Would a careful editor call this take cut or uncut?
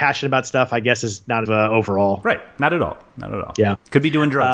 cut